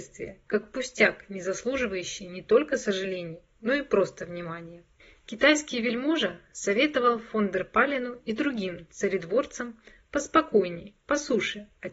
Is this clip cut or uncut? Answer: uncut